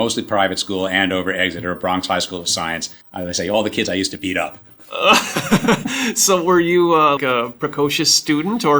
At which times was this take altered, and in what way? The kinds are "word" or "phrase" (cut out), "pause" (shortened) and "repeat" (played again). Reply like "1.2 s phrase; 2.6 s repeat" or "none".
3.0 s pause; 7.2 s word